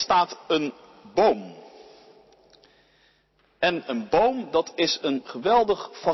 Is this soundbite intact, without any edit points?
yes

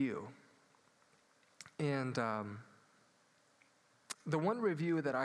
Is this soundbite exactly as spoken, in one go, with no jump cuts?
yes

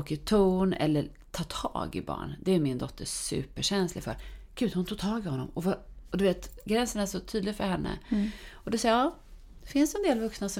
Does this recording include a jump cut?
no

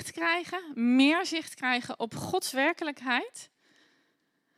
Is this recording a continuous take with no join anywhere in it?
yes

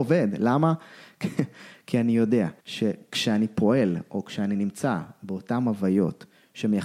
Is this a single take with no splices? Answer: no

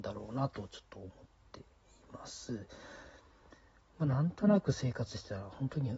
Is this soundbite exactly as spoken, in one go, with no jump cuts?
yes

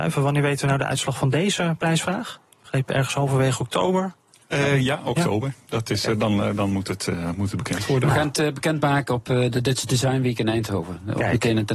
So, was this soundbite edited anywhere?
no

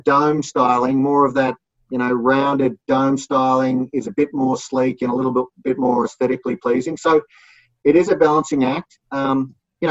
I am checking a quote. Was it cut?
no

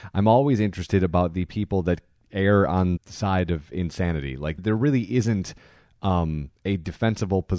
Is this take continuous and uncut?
no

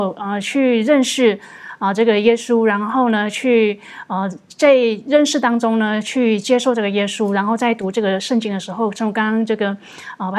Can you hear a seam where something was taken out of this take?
no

